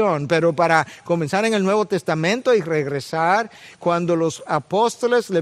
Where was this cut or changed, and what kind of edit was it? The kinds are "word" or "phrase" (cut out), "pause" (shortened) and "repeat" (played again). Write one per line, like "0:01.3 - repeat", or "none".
none

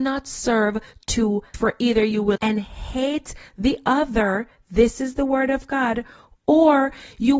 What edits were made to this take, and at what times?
0:01.5 - word
0:02.4 - phrase

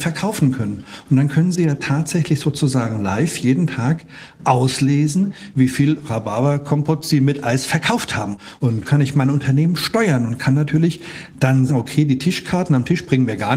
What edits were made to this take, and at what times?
0:08.8 - word
0:11.7 - word

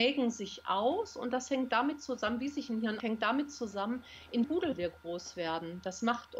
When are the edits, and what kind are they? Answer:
0:03.0 - word
0:04.4 - word

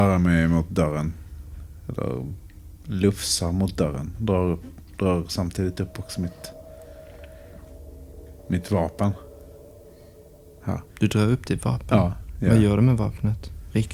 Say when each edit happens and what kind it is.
0:04.9 - pause
0:08.4 - pause
0:10.9 - pause

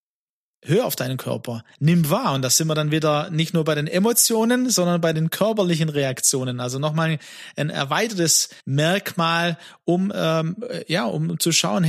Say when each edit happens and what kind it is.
0:01.7 - pause
0:08.6 - pause

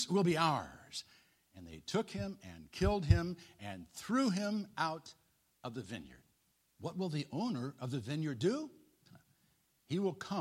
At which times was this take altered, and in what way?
0:06.5 - pause

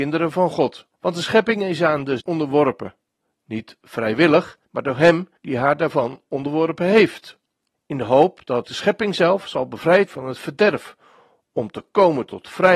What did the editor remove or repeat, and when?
0:00.9 - pause
0:02.2 - word
0:04.6 - pause
0:05.4 - pause
0:07.7 - pause
0:08.6 - word
0:10.1 - phrase

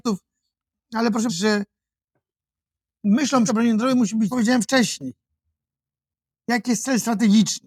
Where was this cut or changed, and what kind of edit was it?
0:01.3 - word
0:03.5 - phrase
0:04.3 - phrase

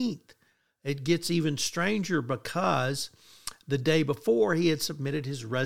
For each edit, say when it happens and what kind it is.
none

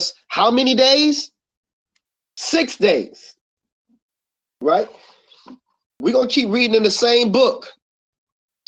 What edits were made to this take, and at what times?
none

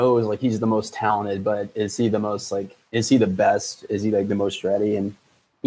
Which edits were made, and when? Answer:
0:02.8 - pause

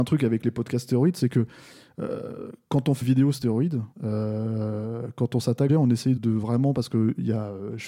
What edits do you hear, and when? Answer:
0:03.0 - word
0:03.9 - pause
0:05.7 - phrase
0:06.2 - word

